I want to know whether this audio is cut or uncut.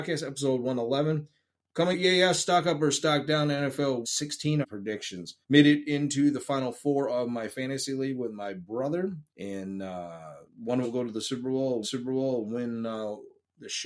cut